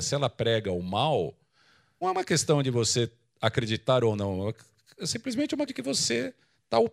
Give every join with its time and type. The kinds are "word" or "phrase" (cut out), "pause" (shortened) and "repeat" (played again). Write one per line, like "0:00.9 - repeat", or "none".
0:02.0 - word
0:05.7 - word